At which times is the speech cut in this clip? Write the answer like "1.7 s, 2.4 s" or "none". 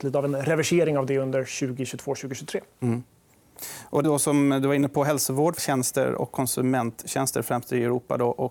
4.0 s, 5.6 s